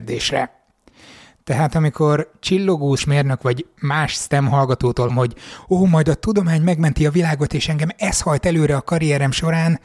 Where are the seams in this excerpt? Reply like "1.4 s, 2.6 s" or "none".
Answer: 3.0 s, 5.1 s